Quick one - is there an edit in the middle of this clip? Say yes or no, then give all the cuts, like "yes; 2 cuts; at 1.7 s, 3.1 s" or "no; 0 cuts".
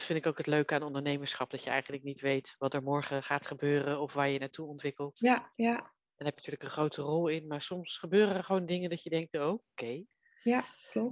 yes; 2 cuts; at 5.5 s, 6.4 s